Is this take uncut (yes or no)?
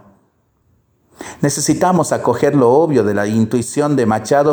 yes